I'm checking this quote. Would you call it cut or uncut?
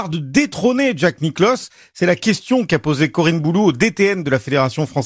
uncut